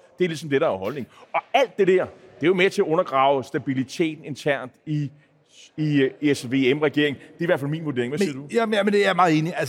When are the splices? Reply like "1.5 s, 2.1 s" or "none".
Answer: none